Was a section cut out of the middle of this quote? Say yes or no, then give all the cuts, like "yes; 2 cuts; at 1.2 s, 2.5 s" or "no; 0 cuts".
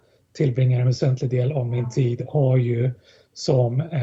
no; 0 cuts